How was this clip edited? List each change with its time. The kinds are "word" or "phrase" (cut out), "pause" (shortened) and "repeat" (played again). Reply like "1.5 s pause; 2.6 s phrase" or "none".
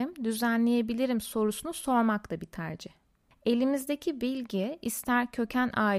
none